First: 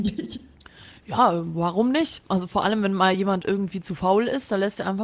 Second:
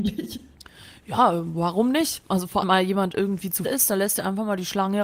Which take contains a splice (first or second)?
second